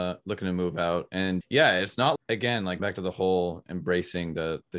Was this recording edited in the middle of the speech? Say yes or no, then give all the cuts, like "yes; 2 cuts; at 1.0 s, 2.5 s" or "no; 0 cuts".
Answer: yes; 3 cuts; at 1.4 s, 2.2 s, 2.8 s